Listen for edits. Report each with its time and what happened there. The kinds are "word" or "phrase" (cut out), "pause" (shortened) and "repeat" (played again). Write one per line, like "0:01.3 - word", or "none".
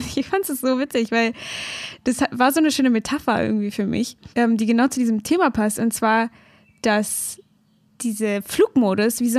0:04.3 - pause
0:07.6 - pause